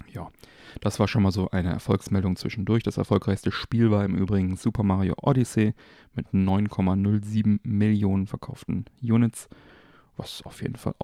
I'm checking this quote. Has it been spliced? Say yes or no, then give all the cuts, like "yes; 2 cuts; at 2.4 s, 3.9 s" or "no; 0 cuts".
no; 0 cuts